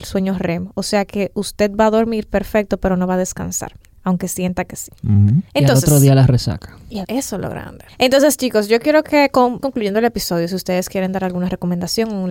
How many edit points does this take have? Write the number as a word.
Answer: five